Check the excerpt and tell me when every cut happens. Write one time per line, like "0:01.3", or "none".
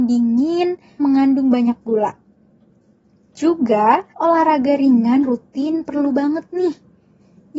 0:01.0
0:04.1
0:05.2